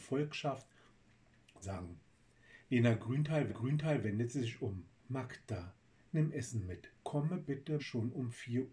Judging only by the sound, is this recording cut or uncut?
cut